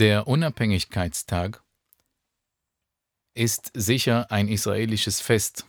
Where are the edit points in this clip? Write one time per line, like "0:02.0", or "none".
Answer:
none